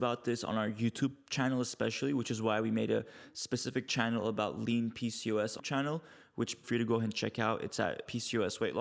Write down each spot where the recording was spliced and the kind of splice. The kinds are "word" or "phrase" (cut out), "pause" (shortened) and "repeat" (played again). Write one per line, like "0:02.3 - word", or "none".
0:05.6 - phrase
0:06.6 - phrase